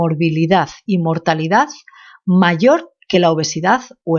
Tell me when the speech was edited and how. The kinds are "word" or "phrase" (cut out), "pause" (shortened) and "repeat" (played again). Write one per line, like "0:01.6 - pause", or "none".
none